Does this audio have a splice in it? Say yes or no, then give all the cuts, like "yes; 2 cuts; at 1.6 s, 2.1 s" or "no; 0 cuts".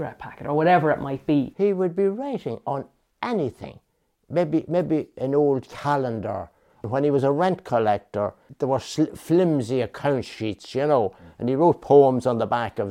no; 0 cuts